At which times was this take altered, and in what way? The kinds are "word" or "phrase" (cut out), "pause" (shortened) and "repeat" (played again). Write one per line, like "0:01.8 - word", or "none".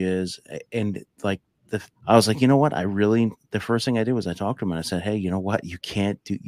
0:01.9 - pause